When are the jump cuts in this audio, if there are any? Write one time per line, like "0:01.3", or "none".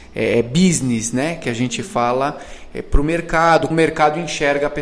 0:03.7

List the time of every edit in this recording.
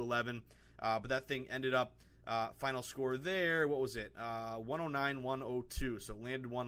none

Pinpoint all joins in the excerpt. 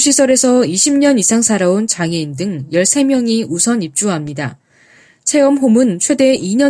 none

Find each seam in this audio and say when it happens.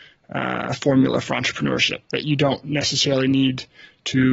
0:02.0

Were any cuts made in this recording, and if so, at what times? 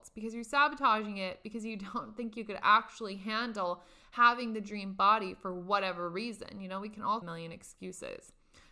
0:07.2

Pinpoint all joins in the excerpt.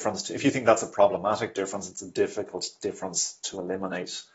none

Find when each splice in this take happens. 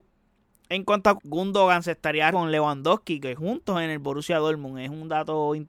0:01.2
0:02.3
0:03.4

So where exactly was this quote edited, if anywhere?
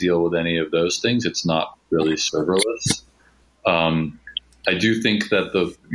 none

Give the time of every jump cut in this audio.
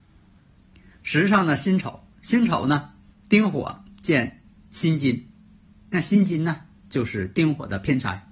none

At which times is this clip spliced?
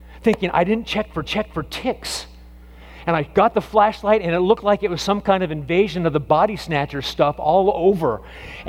0:01.3

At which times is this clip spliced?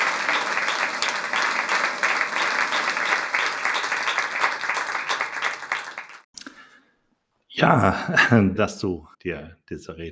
0:08.6
0:09.1

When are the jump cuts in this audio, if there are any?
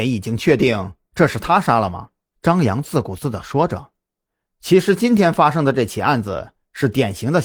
0:02.3

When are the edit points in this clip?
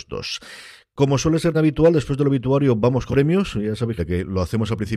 0:01.5
0:03.1
0:04.0

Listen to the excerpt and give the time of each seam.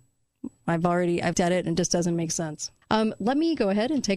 0:01.3
0:02.8

